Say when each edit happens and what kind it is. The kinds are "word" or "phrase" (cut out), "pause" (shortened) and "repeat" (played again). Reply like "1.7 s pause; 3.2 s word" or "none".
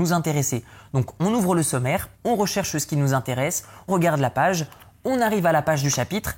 2.1 s pause; 3.9 s word